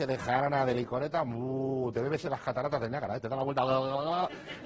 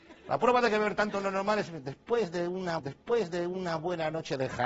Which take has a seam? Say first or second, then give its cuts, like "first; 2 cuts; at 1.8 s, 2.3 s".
second; 1 cut; at 2.8 s